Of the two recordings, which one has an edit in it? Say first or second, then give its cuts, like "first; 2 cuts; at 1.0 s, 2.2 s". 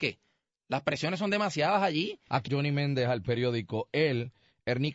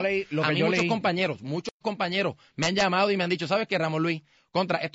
first; 1 cut; at 2.5 s